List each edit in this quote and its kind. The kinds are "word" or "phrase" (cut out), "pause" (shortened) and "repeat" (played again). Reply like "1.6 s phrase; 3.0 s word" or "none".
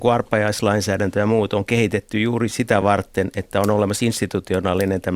none